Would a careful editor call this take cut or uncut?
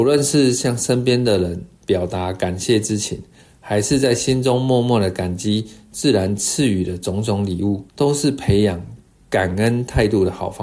cut